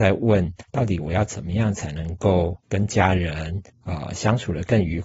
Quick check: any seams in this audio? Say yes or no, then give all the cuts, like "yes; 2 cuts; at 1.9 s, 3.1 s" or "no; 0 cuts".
yes; 2 cuts; at 2.6 s, 3.7 s